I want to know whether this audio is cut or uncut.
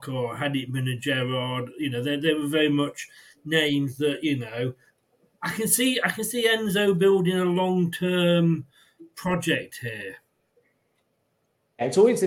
uncut